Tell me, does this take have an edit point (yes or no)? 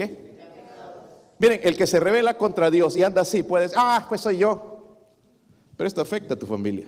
no